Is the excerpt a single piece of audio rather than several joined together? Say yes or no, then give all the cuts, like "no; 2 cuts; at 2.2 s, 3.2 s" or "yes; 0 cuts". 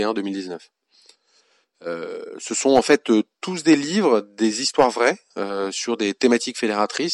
yes; 0 cuts